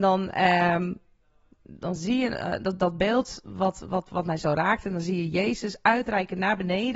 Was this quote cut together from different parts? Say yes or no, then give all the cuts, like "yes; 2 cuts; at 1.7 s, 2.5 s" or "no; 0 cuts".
no; 0 cuts